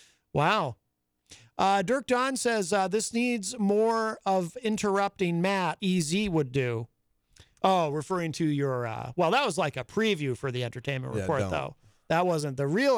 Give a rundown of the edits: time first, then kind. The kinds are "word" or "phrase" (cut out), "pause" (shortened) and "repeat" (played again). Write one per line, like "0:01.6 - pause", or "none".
0:05.8 - word